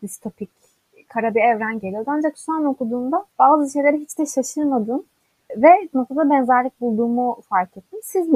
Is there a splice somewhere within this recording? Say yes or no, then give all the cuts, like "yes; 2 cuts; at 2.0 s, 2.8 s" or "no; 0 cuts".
yes; 3 cuts; at 1.8 s, 3.3 s, 5.9 s